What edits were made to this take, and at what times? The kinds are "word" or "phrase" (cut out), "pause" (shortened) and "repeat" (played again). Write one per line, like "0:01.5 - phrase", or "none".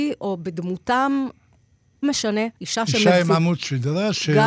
0:02.0 - word
0:02.6 - pause